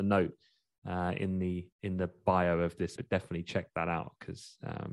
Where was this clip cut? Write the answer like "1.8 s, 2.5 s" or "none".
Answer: 1.7 s, 3.0 s